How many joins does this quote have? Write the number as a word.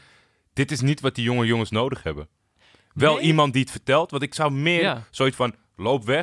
one